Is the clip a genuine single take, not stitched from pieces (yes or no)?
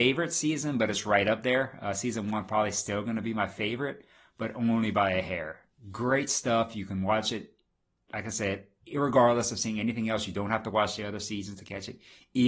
yes